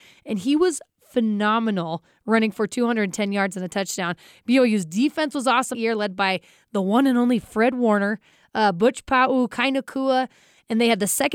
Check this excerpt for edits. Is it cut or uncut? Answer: cut